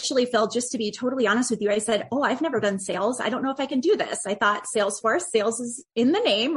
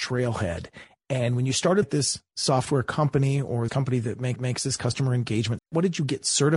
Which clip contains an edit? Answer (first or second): second